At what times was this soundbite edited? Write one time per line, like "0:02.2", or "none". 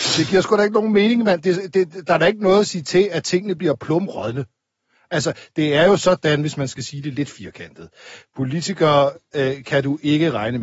none